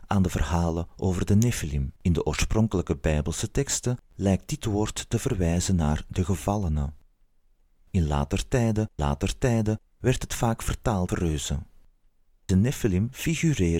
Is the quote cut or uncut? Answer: cut